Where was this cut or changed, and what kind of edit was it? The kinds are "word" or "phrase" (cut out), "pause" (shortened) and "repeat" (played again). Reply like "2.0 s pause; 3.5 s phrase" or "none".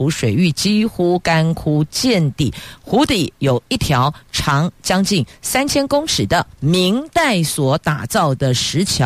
6.5 s pause